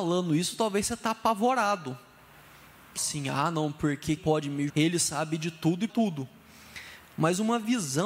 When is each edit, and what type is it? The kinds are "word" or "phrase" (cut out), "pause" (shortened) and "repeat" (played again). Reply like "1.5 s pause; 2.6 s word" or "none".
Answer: 3.0 s word; 4.2 s word; 4.7 s word; 5.9 s word